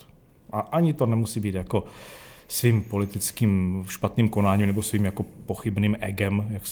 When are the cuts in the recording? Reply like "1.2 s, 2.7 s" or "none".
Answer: none